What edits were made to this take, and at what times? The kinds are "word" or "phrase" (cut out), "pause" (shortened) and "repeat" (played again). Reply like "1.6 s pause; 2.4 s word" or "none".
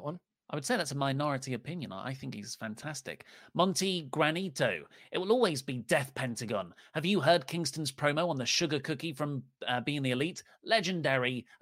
none